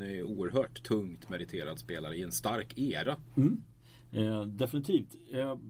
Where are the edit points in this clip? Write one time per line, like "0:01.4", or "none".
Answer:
none